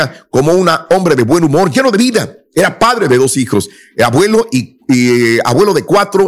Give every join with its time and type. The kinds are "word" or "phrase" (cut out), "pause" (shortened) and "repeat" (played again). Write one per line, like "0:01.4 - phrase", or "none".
none